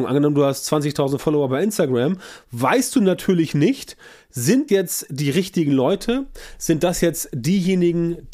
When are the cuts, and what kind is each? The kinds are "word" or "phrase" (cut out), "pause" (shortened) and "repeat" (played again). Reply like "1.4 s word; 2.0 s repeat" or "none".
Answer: 4.7 s word